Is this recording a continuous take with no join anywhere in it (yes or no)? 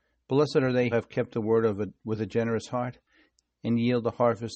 no